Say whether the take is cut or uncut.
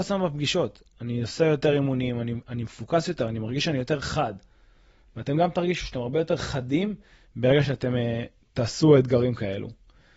uncut